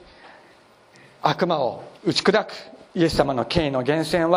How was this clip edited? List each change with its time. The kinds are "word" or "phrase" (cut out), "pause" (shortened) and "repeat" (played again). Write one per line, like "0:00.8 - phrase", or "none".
0:02.0 - pause
0:02.9 - pause